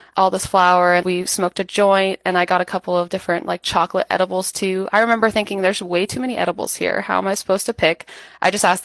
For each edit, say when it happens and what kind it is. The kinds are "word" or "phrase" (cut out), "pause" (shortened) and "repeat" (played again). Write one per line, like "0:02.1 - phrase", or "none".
0:01.0 - word